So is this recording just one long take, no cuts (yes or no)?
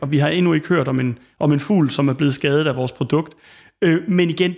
yes